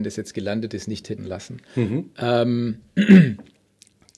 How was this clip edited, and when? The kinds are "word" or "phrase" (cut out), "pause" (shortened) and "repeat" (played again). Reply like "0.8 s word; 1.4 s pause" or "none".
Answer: 1.2 s word